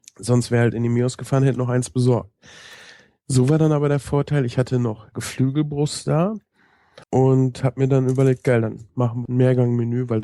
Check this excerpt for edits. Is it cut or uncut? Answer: cut